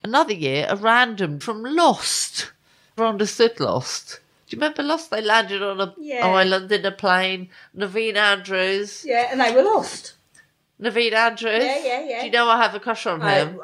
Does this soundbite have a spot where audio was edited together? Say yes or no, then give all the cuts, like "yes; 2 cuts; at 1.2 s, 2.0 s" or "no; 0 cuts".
yes; 2 cuts; at 1.4 s, 3.0 s